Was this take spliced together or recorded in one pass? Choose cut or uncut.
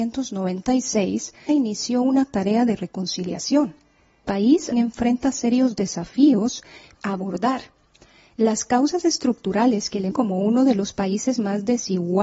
cut